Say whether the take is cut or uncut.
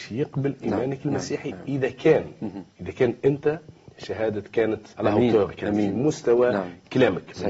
cut